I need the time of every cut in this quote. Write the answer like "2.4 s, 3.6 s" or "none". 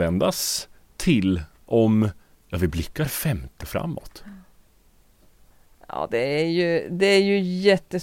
3.6 s